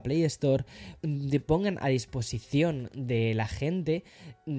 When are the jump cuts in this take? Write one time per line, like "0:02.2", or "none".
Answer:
0:01.0